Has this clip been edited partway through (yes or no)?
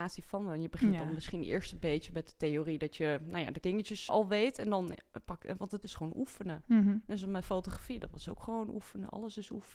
yes